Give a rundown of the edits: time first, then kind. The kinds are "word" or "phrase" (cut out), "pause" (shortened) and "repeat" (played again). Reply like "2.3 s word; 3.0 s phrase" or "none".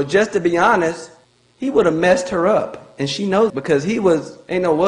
1.2 s pause; 3.5 s word